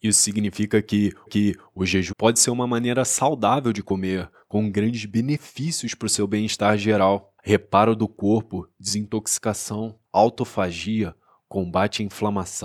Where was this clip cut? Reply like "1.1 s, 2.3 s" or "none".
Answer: 1.3 s, 2.1 s, 7.4 s, 10.1 s

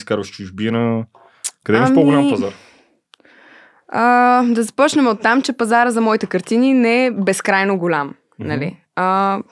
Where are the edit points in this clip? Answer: none

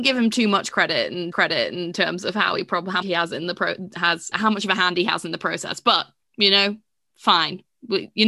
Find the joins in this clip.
1.3 s, 3.0 s, 4.3 s, 6.2 s

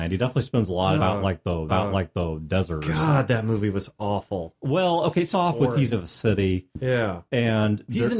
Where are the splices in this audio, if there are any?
1.0 s, 1.7 s, 5.3 s, 5.9 s

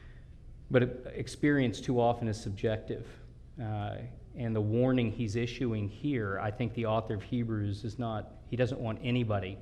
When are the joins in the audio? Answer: none

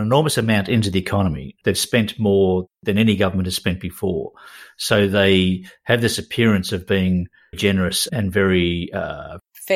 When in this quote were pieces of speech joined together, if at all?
7.5 s

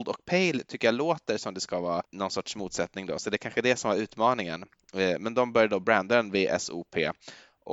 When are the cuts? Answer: 2.0 s

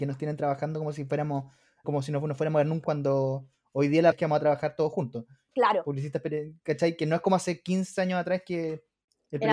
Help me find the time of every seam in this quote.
1.8 s, 2.8 s, 4.1 s

